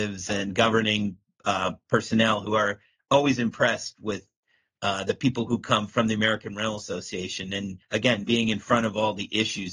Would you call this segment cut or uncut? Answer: cut